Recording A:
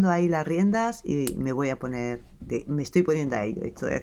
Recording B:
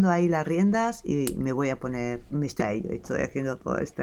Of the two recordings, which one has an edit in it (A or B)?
B